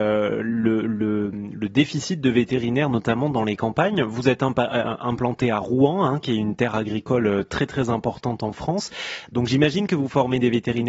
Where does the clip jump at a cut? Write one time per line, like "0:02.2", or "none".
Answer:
none